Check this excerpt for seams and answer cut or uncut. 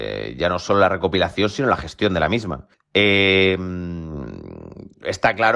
cut